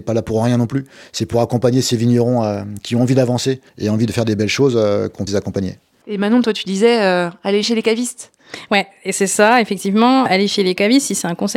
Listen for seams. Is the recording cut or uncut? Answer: cut